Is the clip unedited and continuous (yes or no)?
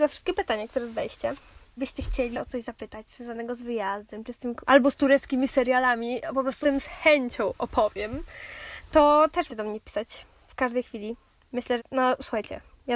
no